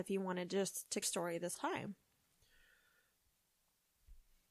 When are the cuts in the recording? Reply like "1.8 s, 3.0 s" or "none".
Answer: 1.0 s, 1.6 s